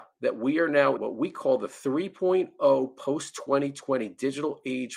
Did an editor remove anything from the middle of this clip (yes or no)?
yes